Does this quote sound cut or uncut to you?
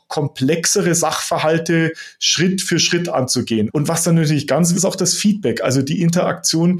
cut